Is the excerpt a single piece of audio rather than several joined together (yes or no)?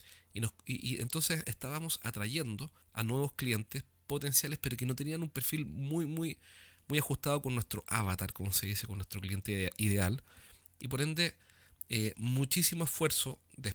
no